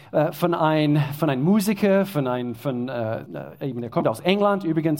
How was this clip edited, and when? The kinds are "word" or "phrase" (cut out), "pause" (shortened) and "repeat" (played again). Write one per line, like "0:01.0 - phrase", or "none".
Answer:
0:02.6 - word
0:03.3 - word